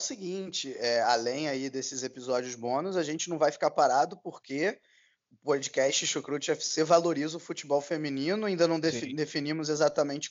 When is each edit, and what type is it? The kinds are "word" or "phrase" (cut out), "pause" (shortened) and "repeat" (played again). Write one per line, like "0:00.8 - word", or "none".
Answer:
none